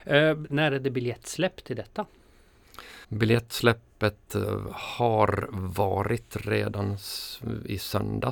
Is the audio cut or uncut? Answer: cut